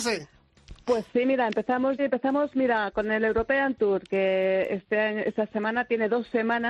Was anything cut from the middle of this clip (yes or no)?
yes